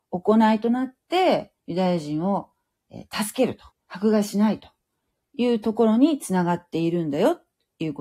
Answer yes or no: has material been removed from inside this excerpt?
yes